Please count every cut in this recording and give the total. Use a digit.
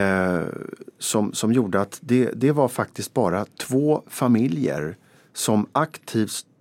0